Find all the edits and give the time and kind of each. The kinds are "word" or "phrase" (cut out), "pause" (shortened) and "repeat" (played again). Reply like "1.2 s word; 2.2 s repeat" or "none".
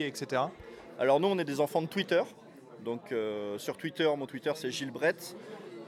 none